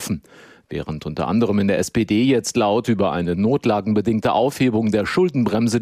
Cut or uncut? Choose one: uncut